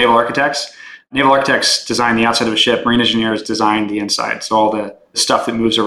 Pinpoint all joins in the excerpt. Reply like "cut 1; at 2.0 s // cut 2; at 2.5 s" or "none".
none